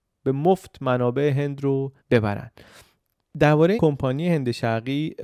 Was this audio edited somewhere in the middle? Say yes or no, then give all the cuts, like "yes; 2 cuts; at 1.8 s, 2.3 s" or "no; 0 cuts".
yes; 2 cuts; at 2.0 s, 3.8 s